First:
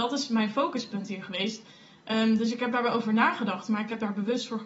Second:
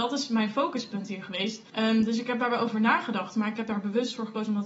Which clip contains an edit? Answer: second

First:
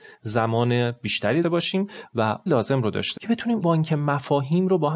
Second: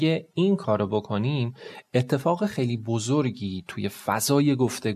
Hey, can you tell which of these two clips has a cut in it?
first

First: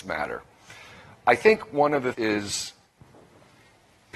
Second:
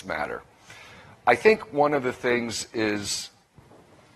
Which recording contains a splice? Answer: first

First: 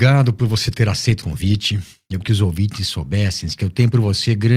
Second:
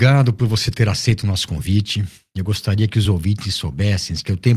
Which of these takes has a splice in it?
first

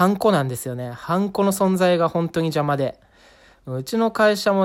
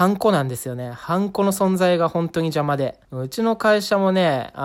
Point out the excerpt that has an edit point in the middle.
second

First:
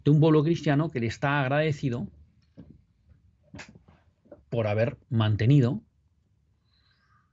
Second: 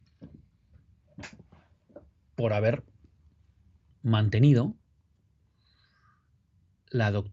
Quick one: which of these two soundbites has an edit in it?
first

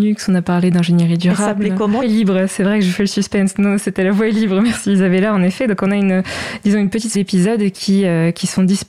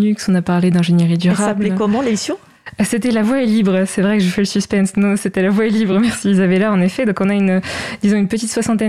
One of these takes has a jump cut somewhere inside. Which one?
first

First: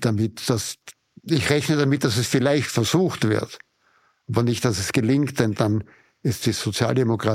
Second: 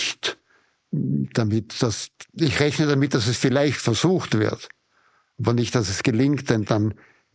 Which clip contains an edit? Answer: second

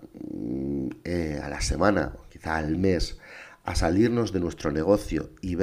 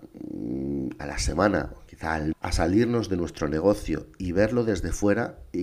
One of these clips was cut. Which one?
second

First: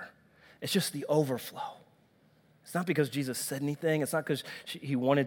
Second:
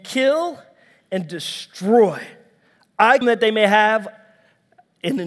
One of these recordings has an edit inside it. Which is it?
second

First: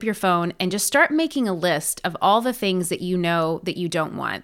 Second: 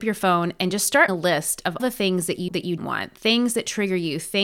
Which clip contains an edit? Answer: second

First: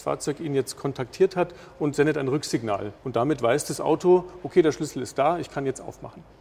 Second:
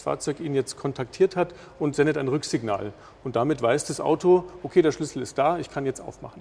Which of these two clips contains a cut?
first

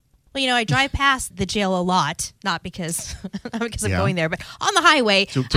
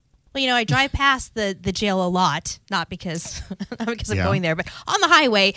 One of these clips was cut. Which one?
first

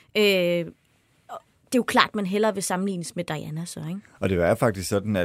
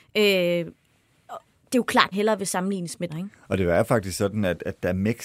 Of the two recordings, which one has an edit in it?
second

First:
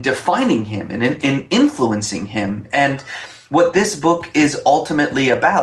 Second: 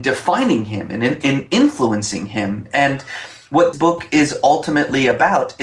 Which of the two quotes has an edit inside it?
second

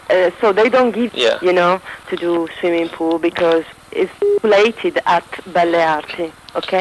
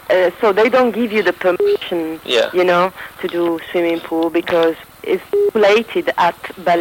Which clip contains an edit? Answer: first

